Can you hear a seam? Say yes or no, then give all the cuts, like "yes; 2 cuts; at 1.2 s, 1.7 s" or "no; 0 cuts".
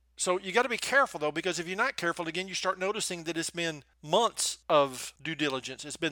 yes; 1 cut; at 3.9 s